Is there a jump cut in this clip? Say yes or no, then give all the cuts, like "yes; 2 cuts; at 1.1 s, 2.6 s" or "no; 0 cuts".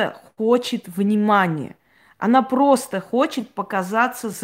no; 0 cuts